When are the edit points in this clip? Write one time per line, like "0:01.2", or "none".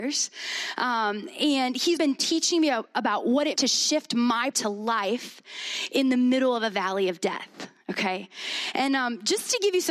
0:02.0
0:03.6
0:04.5